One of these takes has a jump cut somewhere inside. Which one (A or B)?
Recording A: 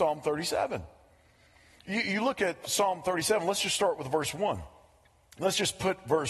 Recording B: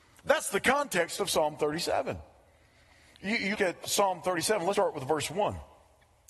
B